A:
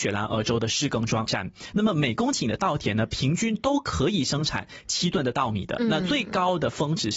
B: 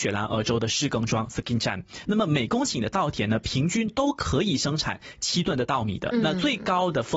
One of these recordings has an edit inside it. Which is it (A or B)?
A